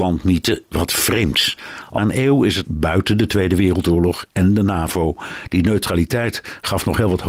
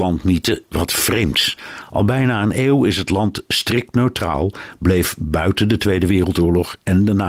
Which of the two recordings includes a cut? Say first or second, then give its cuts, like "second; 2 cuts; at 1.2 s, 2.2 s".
first; 2 cuts; at 2.0 s, 2.6 s